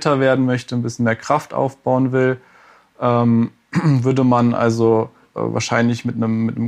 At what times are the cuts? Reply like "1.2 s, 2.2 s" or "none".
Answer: 5.2 s